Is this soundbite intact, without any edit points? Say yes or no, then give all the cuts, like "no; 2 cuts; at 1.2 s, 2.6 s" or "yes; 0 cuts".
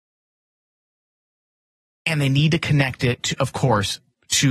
yes; 0 cuts